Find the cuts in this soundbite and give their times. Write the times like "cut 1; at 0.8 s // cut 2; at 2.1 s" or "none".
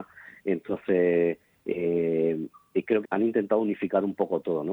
cut 1; at 3.0 s